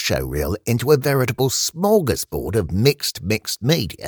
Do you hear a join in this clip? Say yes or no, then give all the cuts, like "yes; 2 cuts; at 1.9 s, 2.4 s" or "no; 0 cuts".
no; 0 cuts